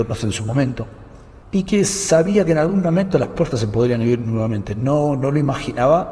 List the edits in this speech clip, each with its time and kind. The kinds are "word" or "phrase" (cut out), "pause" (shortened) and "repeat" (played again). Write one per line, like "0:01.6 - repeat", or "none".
0:01.4 - pause